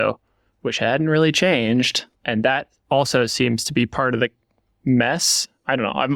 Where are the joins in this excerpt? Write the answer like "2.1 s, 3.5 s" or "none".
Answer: 2.1 s